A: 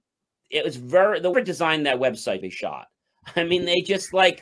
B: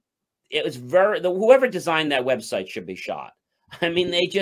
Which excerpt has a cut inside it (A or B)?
A